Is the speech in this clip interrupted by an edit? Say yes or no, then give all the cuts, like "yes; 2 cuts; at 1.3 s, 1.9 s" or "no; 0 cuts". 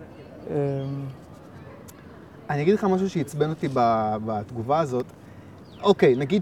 no; 0 cuts